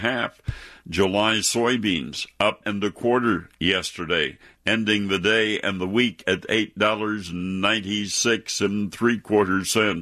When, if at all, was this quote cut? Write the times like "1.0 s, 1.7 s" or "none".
2.6 s